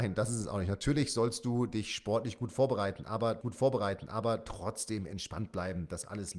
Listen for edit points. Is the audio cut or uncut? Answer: cut